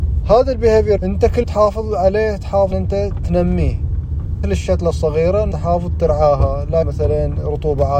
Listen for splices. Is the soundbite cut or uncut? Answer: cut